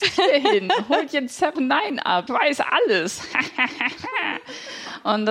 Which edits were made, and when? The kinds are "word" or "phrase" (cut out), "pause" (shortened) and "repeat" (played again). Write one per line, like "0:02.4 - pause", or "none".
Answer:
0:01.5 - word
0:02.3 - word